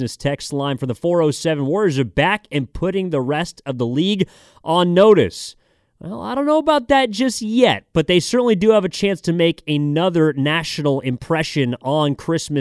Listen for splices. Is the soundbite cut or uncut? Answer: uncut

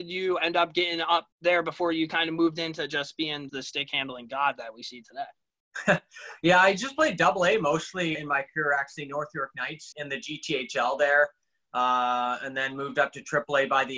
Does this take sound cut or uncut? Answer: cut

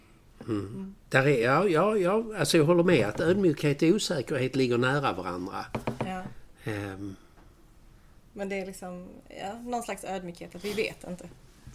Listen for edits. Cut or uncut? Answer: uncut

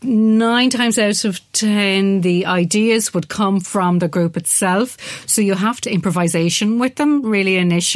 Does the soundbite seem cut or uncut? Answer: cut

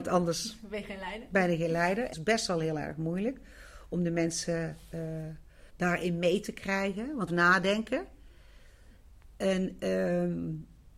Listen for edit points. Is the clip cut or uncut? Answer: cut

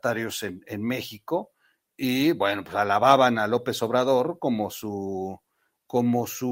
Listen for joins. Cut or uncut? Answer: uncut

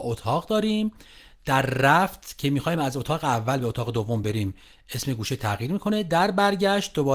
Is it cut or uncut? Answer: uncut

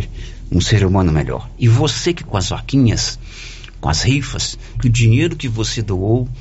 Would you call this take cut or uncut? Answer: cut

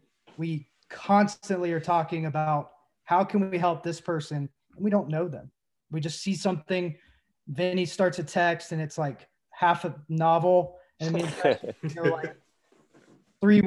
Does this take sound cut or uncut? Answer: uncut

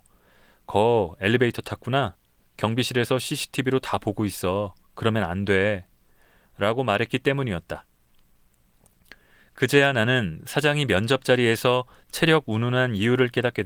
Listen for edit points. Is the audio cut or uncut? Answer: uncut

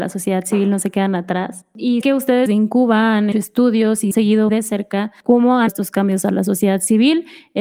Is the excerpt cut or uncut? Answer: cut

